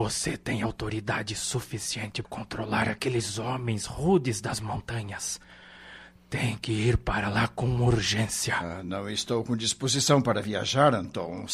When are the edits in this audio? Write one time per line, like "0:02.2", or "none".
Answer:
0:02.2